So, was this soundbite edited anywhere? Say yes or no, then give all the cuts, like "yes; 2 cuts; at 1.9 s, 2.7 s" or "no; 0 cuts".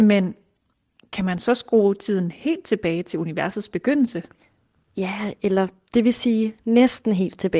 no; 0 cuts